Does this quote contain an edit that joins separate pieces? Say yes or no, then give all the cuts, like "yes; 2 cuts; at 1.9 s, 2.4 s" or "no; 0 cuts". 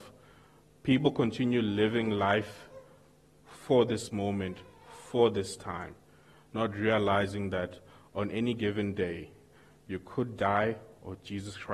no; 0 cuts